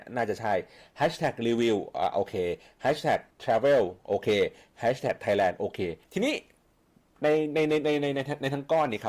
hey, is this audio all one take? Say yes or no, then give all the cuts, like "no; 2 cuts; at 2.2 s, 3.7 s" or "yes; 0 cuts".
no; 2 cuts; at 3.3 s, 6.0 s